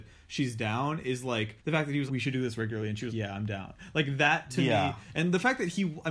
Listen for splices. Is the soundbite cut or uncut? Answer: cut